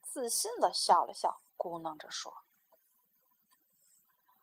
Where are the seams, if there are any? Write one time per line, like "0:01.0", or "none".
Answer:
0:01.5